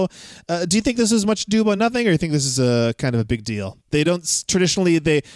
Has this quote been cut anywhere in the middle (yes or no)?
no